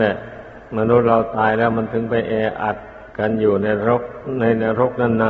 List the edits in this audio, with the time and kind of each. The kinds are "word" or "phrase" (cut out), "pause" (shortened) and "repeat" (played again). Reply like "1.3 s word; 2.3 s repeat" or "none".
3.1 s pause

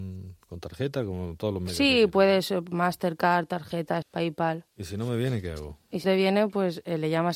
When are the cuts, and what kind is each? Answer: 4.0 s word; 6.0 s word

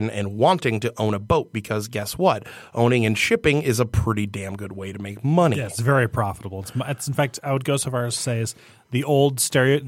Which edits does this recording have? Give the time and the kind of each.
none

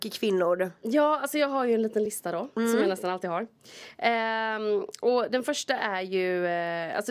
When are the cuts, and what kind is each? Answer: none

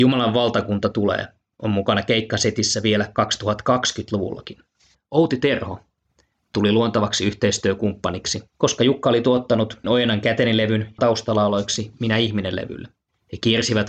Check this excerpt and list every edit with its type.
9.8 s word; 11.0 s phrase

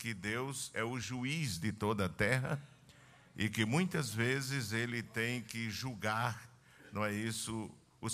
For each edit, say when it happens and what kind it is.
none

